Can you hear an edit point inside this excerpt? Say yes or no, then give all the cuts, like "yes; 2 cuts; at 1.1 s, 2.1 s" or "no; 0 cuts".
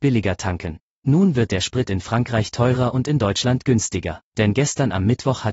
yes; 2 cuts; at 0.9 s, 4.3 s